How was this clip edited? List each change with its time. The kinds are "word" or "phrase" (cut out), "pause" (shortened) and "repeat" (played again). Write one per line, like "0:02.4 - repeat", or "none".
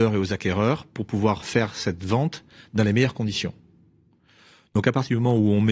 none